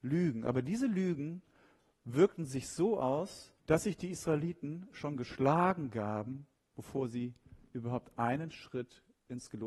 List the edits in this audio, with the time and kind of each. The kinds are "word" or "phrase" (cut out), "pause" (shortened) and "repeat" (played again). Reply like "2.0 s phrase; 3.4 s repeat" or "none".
3.6 s pause